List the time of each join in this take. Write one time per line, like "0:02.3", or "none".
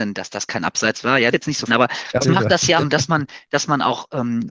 0:01.3
0:01.7
0:02.2
0:02.8